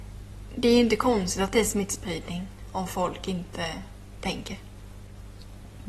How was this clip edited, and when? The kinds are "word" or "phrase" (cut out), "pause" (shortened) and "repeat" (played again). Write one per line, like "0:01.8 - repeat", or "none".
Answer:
none